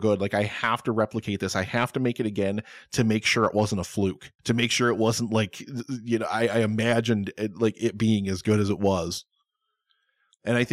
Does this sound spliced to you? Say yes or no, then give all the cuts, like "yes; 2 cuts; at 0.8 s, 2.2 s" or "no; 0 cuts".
yes; 1 cut; at 4.4 s